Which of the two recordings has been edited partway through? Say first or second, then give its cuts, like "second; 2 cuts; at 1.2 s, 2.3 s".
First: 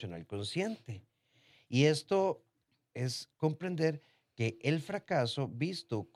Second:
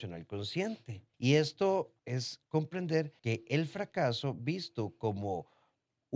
second; 3 cuts; at 1.1 s, 2.0 s, 3.2 s